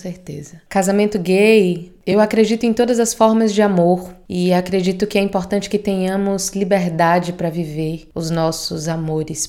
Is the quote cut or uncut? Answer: uncut